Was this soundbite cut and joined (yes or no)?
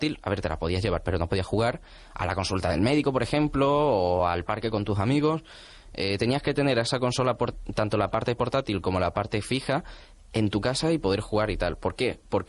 no